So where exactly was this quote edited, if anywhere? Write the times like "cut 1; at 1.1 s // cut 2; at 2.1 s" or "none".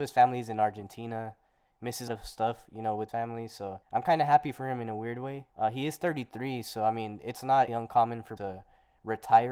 cut 1; at 2.1 s // cut 2; at 3.1 s // cut 3; at 3.8 s // cut 4; at 5.5 s // cut 5; at 7.7 s // cut 6; at 8.4 s